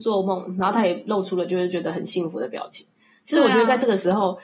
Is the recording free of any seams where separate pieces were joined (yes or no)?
yes